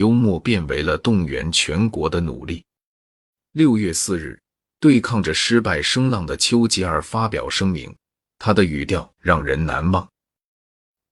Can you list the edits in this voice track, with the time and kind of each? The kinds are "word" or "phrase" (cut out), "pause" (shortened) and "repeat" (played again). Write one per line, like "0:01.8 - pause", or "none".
none